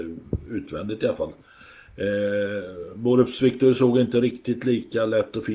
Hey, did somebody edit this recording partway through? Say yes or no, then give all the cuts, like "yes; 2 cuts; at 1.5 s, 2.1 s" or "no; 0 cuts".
no; 0 cuts